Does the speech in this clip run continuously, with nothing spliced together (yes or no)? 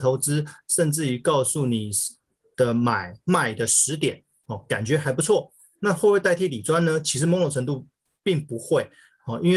yes